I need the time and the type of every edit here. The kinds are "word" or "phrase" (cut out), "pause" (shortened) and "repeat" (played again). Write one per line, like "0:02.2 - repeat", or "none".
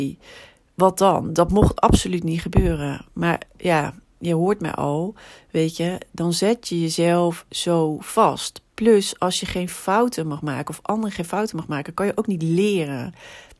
0:03.5 - pause